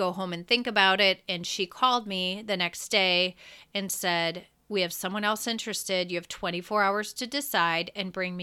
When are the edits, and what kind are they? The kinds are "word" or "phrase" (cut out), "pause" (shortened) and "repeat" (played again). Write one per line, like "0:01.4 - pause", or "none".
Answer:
none